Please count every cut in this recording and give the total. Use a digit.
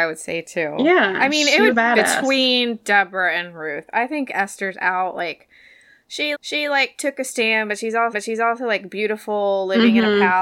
3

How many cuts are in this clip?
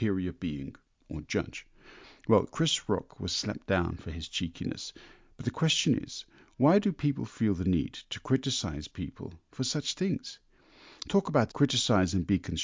1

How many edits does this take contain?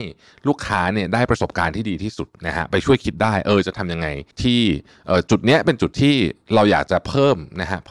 2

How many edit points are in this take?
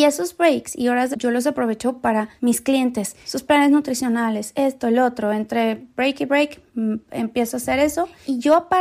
1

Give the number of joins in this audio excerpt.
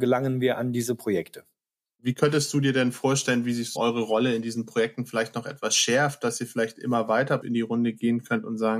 2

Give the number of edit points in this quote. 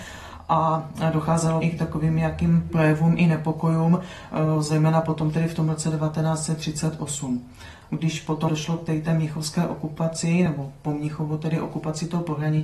0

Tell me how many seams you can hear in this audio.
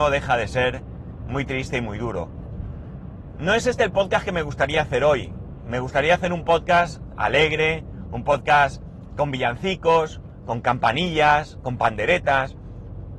0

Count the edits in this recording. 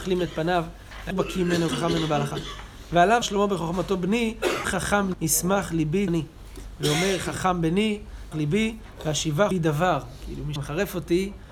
9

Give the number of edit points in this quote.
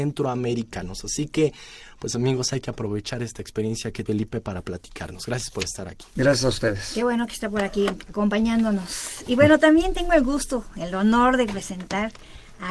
1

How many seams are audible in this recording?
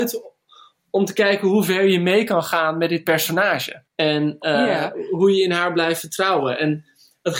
1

